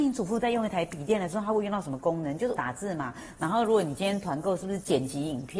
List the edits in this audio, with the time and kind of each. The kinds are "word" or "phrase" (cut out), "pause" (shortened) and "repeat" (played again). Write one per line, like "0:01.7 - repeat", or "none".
0:02.6 - word